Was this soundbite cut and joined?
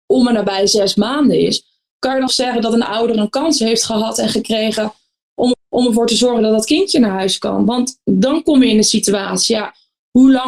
yes; 2 cuts; at 2.3 s, 5.5 s

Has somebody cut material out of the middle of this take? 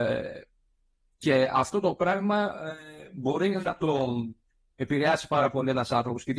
no; 0 cuts

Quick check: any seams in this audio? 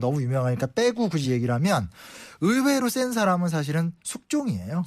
no; 0 cuts

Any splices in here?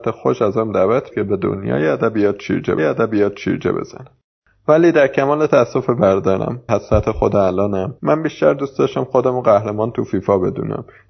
yes; 4 cuts; at 1.1 s, 2.8 s, 6.7 s, 8.0 s

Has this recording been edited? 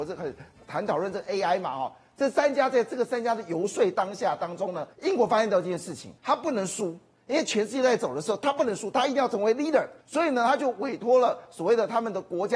yes; 3 cuts; at 4.9 s, 6.2 s, 10.0 s

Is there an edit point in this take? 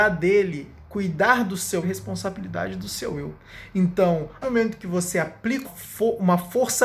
yes; 3 cuts; at 1.8 s, 4.4 s, 5.6 s

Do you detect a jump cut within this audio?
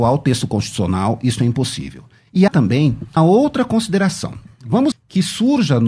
yes; 3 cuts; at 2.5 s, 3.2 s, 4.9 s

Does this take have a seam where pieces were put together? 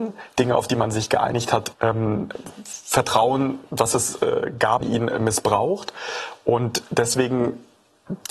yes; 2 cuts; at 1.7 s, 4.8 s

